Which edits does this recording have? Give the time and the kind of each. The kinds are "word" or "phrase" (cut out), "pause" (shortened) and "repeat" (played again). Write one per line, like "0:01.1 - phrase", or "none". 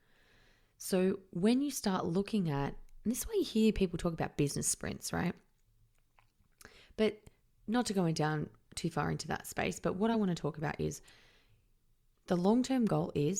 none